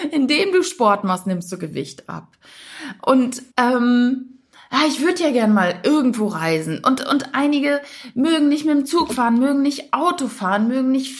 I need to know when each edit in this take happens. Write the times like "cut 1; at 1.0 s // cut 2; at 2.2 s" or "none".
cut 1; at 3.5 s